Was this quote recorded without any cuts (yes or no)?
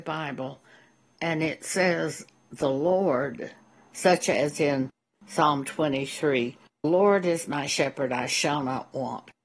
no